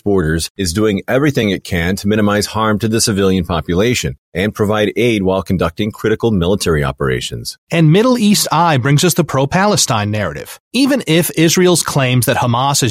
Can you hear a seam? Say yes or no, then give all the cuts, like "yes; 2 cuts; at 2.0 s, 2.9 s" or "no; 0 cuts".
no; 0 cuts